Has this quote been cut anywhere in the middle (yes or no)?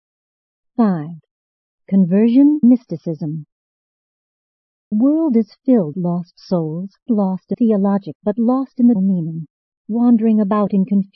yes